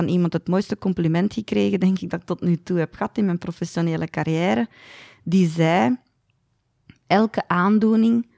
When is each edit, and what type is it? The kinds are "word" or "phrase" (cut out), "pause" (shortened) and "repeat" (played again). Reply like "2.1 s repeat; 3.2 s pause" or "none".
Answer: none